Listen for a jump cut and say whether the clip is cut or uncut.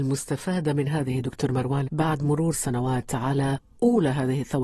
cut